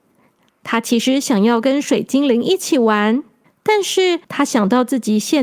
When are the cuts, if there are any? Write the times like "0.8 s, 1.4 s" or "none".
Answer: 3.4 s, 4.2 s